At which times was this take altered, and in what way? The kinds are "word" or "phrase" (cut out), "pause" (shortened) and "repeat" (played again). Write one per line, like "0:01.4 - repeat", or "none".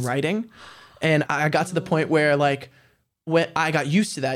0:01.3 - word